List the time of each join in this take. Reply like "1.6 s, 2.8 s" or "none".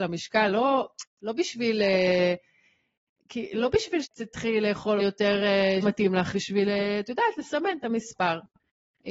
4.0 s, 5.0 s, 5.8 s, 6.3 s